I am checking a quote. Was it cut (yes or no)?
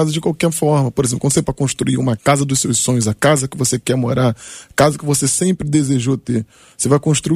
yes